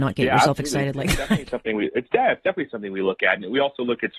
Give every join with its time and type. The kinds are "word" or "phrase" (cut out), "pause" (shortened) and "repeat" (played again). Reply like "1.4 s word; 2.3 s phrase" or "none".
none